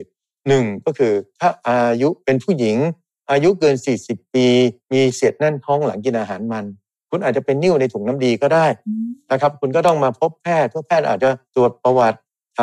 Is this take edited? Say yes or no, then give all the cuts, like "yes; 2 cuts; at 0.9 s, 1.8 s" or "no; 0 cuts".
yes; 2 cuts; at 4.8 s, 11.5 s